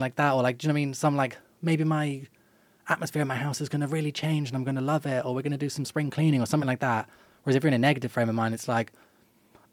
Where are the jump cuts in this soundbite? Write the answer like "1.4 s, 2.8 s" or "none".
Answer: none